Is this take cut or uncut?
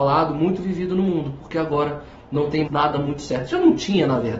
cut